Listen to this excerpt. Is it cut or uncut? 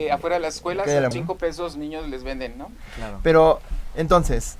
cut